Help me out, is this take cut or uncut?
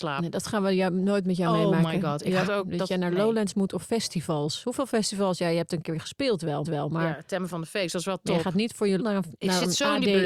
cut